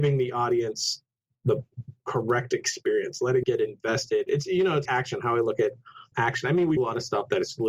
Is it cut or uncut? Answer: cut